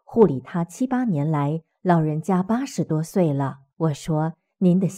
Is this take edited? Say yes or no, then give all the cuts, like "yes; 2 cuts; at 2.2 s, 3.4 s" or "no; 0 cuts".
yes; 1 cut; at 3.7 s